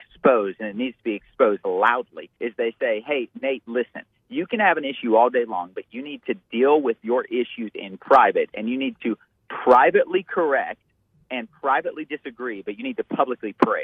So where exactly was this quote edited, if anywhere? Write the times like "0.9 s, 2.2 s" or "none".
2.4 s